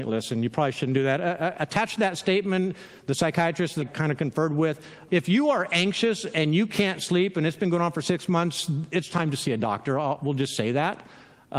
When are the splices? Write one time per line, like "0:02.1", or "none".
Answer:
0:03.8
0:05.1